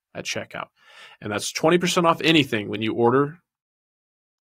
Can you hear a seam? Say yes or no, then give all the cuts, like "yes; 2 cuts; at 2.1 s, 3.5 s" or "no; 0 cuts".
no; 0 cuts